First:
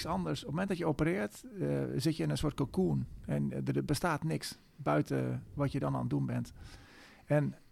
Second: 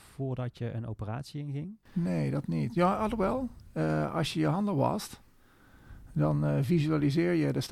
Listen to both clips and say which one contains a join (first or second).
second